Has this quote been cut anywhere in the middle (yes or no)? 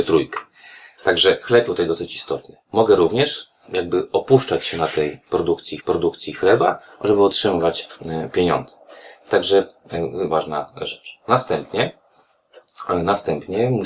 yes